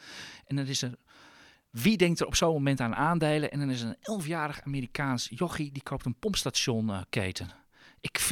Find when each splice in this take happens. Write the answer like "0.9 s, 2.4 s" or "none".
none